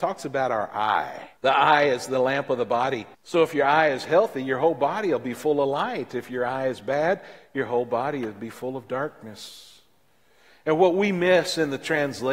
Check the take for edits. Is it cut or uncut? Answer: cut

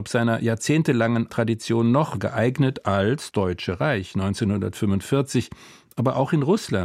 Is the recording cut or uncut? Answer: cut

